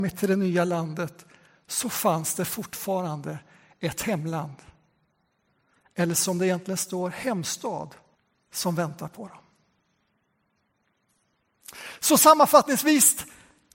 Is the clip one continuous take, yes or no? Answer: no